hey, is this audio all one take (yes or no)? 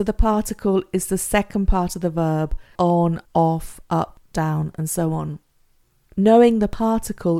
no